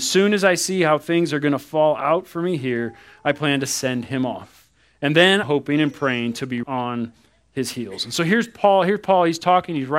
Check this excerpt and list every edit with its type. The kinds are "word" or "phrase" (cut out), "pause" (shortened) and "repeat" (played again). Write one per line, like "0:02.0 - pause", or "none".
0:05.4 - word
0:06.6 - word